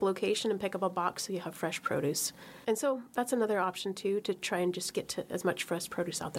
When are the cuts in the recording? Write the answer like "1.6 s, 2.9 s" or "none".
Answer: none